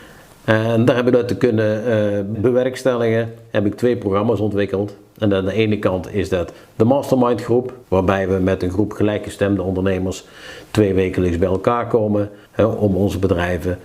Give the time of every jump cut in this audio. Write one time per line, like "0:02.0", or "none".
0:01.1
0:02.3
0:07.8
0:12.4